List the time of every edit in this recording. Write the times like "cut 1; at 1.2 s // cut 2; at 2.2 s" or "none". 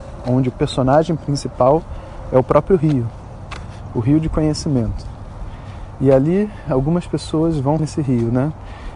cut 1; at 7.8 s